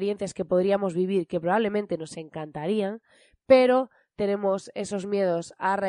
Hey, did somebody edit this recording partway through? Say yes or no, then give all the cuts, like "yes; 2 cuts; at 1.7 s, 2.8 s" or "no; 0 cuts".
no; 0 cuts